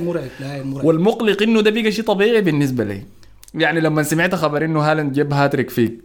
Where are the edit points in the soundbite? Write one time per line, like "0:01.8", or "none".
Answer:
none